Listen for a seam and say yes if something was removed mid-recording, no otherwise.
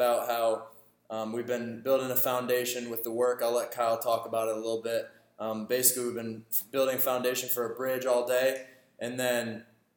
no